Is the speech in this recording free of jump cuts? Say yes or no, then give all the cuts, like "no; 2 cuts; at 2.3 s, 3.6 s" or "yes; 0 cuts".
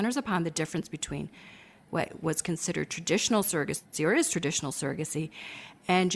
yes; 0 cuts